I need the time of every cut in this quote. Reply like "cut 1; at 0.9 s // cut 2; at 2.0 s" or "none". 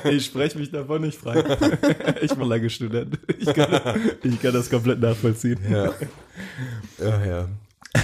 cut 1; at 2.4 s